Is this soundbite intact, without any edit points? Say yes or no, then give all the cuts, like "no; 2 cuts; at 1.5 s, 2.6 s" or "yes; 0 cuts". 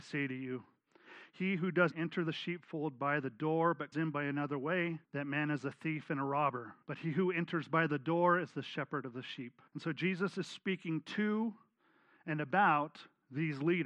no; 5 cuts; at 1.9 s, 3.9 s, 5.0 s, 6.8 s, 9.7 s